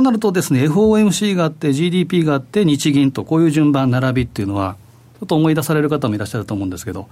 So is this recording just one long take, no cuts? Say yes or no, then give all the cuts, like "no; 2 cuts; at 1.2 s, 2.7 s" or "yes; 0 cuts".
yes; 0 cuts